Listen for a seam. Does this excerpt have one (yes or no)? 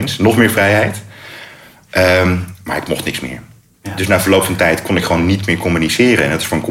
no